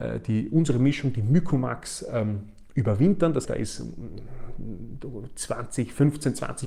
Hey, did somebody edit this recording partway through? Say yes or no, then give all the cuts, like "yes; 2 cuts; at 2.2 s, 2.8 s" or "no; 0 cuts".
yes; 1 cut; at 3.4 s